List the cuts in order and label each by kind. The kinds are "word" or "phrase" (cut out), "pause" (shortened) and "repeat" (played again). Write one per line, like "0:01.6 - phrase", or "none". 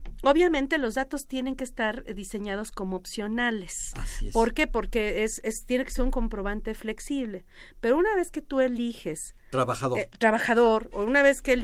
none